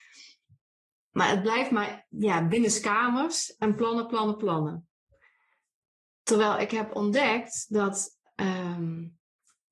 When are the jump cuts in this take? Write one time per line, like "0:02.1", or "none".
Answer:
none